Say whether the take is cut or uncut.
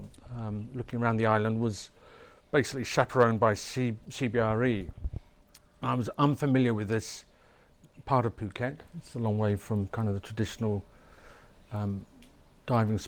uncut